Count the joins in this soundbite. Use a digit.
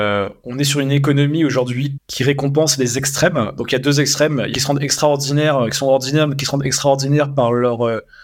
2